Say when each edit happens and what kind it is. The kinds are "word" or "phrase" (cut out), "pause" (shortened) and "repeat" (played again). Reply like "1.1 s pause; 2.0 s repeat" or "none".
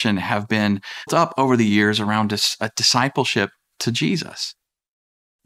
1.1 s word